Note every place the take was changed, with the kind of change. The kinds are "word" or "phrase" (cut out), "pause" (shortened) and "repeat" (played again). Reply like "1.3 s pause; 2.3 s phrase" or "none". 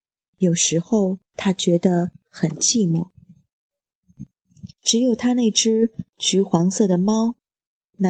1.2 s pause; 4.7 s pause